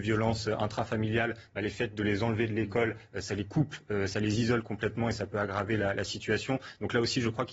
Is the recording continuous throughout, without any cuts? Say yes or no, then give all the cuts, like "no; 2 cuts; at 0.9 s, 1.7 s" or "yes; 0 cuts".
yes; 0 cuts